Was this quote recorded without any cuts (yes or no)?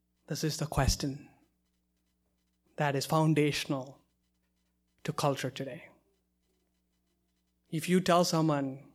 yes